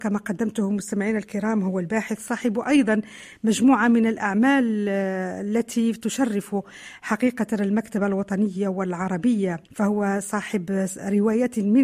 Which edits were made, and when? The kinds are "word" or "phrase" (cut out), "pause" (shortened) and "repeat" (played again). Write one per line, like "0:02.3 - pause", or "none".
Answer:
0:09.6 - pause